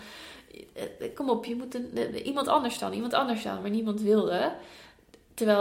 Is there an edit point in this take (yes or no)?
no